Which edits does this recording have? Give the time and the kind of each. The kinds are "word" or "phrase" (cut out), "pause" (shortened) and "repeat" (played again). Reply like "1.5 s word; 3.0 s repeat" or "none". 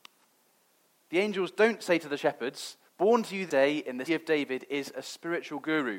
2.9 s pause; 3.5 s word; 4.1 s word